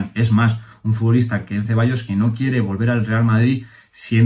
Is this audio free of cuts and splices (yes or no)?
no